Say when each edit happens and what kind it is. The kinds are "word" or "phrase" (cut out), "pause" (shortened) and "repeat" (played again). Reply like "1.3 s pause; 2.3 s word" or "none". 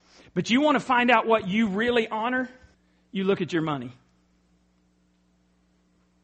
2.7 s pause